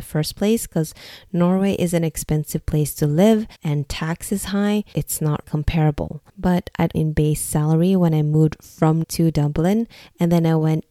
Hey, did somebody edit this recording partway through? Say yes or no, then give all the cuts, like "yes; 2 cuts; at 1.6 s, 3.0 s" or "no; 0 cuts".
yes; 6 cuts; at 3.5 s, 4.9 s, 5.4 s, 6.3 s, 6.9 s, 9.0 s